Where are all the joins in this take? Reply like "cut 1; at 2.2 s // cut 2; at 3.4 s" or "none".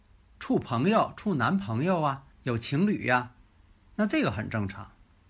cut 1; at 2.3 s